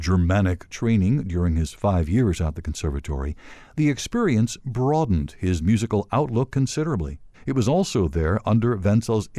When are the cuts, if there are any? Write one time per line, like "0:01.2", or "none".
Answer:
0:07.3